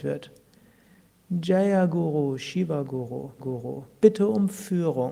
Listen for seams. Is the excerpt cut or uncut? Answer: cut